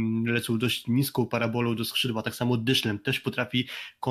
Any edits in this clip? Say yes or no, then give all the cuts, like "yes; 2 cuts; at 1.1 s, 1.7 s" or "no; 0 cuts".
no; 0 cuts